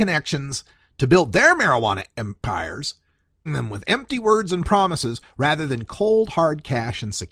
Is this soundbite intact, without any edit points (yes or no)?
no